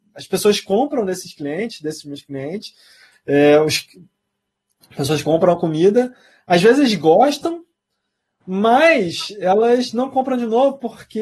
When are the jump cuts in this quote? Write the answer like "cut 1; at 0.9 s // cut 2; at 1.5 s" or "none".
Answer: none